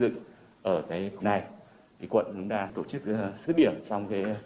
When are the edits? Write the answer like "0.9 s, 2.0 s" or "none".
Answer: 1.2 s, 3.4 s